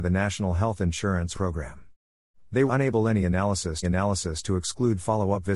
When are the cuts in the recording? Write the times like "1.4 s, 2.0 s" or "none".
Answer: 1.3 s, 2.7 s, 3.8 s